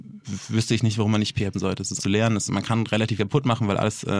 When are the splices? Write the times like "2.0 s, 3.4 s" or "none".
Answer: 1.5 s, 2.0 s, 2.5 s, 3.2 s